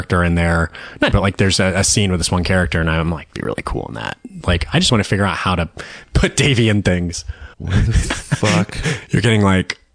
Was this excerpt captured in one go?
no; 4 cuts; at 1.1 s, 3.3 s, 4.9 s, 7.5 s

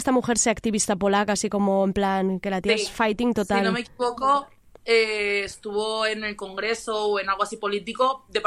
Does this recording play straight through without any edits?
yes; 0 cuts

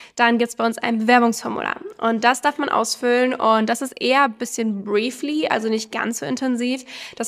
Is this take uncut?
yes; 0 cuts

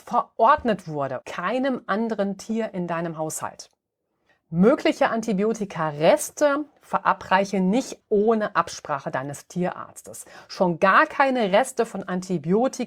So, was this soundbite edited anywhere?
yes; 2 cuts; at 1.2 s, 8.0 s

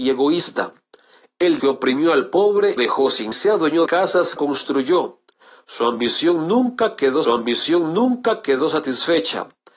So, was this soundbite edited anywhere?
yes; 6 cuts; at 1.6 s, 2.8 s, 3.3 s, 3.9 s, 4.4 s, 7.2 s

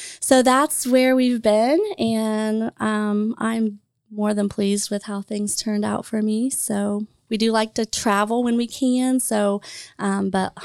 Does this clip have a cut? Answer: no; 0 cuts

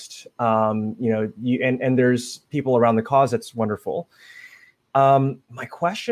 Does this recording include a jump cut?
no; 0 cuts

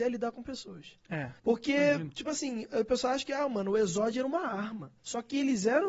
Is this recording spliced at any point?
yes; 2 cuts; at 1.4 s, 5.0 s

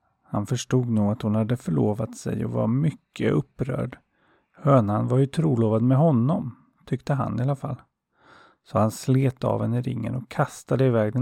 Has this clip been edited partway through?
no; 0 cuts

